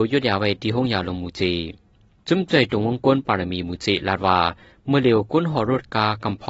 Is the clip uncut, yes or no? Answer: yes